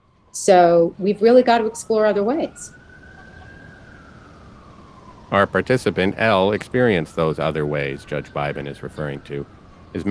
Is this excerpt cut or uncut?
cut